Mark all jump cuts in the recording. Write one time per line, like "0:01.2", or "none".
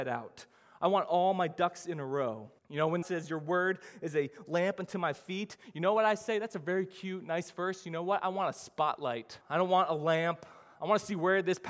0:02.6
0:03.0
0:09.4